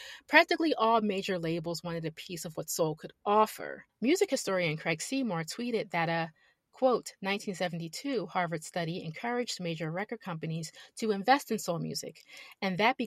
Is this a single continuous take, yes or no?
yes